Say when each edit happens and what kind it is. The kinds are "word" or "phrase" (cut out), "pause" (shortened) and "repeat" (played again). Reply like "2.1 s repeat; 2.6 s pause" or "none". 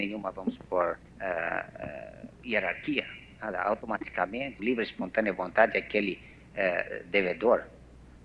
1.1 s pause; 2.3 s pause; 4.6 s phrase